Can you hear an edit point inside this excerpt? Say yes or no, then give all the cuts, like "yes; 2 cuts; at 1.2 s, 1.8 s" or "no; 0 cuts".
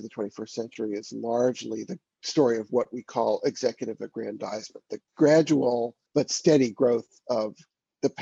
yes; 1 cut; at 6.1 s